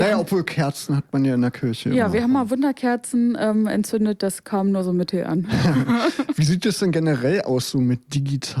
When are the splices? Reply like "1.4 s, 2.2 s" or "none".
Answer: none